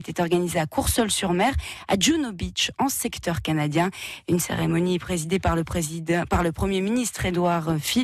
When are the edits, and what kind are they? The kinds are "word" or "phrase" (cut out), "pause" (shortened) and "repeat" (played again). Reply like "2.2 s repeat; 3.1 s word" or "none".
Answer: none